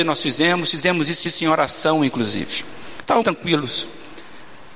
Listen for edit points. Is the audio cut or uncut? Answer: cut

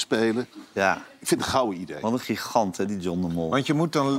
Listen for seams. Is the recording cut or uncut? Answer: uncut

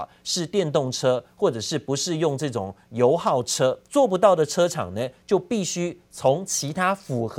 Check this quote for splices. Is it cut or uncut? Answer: cut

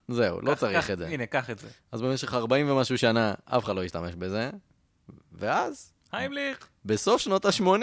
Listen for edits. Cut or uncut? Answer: uncut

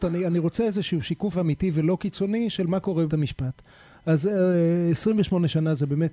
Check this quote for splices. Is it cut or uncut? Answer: cut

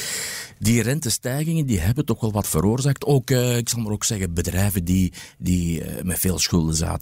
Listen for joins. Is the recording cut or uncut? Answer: uncut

